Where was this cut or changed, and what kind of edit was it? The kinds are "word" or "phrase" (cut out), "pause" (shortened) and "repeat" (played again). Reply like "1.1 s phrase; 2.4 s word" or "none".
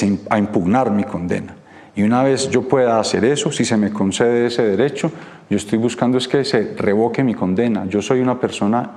none